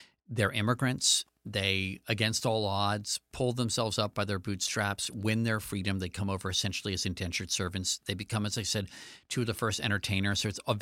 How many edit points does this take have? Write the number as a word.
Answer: zero